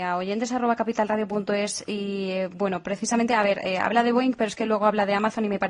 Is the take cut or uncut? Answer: uncut